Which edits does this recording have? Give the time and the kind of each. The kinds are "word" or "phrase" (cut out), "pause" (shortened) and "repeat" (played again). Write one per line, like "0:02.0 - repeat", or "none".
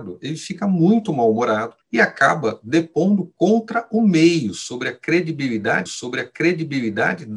0:01.8 - pause
0:05.9 - repeat